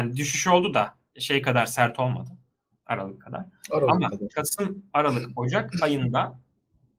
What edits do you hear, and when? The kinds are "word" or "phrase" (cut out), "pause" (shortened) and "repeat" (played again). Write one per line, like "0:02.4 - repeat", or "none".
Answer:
none